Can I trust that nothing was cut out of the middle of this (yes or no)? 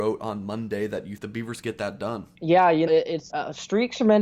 no